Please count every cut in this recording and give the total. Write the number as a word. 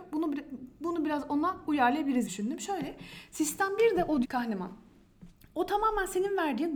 two